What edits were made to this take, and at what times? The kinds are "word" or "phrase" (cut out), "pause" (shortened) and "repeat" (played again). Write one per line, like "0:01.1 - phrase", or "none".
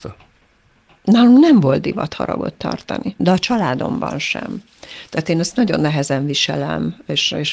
0:03.2 - word